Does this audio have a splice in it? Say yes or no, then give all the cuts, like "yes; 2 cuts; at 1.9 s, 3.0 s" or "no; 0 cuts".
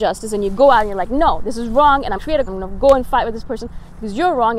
yes; 2 cuts; at 2.2 s, 2.5 s